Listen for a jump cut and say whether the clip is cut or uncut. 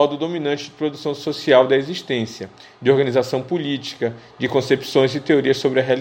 uncut